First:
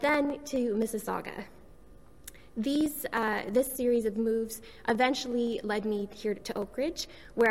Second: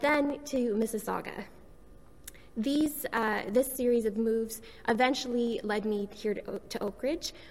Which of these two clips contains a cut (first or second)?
first